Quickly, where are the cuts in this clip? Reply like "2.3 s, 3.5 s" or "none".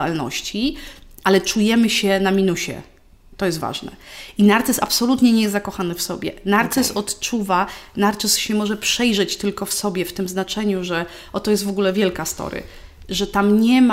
none